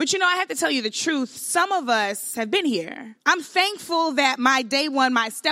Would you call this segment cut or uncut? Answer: cut